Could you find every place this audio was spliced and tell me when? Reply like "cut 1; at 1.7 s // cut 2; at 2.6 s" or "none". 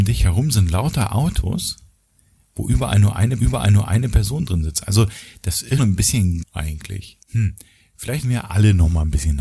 cut 1; at 3.4 s // cut 2; at 5.8 s // cut 3; at 6.4 s // cut 4; at 7.2 s // cut 5; at 8.2 s